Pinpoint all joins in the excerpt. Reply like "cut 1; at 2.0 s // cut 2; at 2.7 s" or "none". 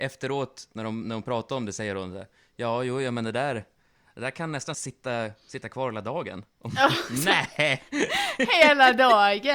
none